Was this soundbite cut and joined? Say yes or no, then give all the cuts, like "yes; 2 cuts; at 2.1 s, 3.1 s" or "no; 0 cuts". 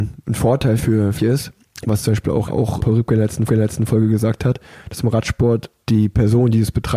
yes; 5 cuts; at 1.2 s, 2.5 s, 2.8 s, 3.5 s, 5.8 s